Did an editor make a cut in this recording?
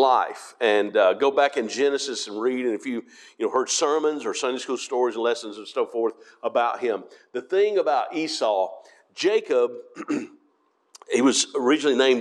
no; 0 cuts

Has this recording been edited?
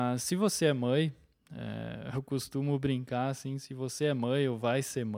no; 0 cuts

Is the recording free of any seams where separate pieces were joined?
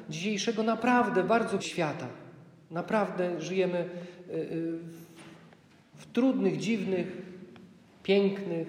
no; 1 cut; at 1.6 s

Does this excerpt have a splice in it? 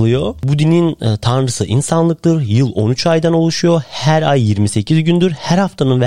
no; 0 cuts

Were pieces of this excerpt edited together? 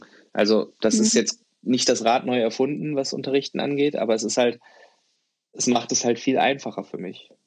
no; 0 cuts

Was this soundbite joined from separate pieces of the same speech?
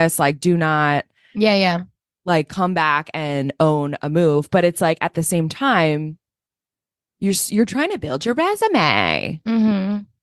no; 0 cuts

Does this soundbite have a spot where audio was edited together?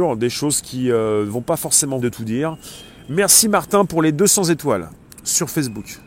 yes; 2 cuts; at 2.0 s, 5.1 s

